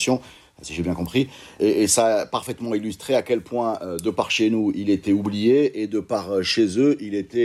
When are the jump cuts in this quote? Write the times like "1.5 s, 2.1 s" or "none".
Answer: none